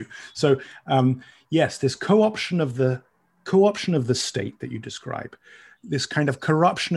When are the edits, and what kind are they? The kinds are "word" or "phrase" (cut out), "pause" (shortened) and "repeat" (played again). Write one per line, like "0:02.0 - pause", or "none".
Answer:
none